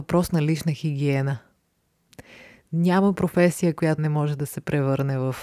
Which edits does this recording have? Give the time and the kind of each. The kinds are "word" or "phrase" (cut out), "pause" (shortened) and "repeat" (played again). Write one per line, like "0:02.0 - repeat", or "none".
0:04.0 - word

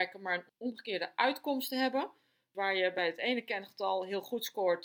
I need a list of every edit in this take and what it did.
none

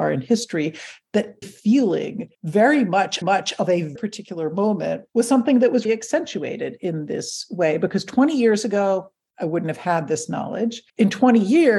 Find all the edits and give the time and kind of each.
0:01.4 - word
0:02.3 - pause
0:03.2 - repeat
0:04.0 - word
0:05.1 - pause
0:05.8 - word
0:10.9 - pause

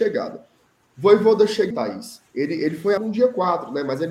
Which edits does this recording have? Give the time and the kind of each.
0:01.7 - word
0:02.3 - pause
0:03.0 - word

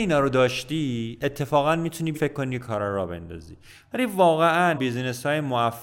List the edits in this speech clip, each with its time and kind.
0:02.1 - word
0:04.7 - word

